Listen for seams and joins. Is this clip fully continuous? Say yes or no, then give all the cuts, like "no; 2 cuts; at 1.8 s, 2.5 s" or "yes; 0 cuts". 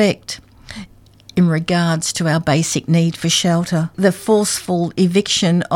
yes; 0 cuts